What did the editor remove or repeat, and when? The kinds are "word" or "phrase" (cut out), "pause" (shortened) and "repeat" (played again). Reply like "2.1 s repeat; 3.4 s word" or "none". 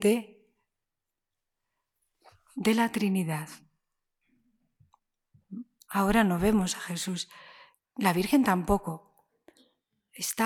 none